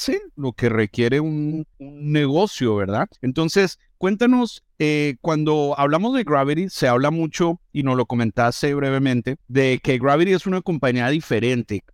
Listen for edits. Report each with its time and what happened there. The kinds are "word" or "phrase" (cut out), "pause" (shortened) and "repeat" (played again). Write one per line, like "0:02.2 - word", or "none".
0:01.7 - pause
0:03.2 - pause
0:09.4 - pause